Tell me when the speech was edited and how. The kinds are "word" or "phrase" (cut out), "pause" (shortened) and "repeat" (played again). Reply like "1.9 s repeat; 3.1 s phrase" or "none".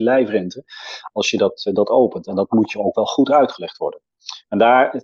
none